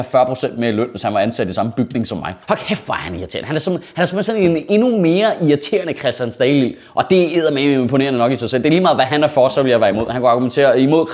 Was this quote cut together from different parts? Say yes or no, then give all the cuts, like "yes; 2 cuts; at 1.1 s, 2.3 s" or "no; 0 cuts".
yes; 1 cut; at 2.4 s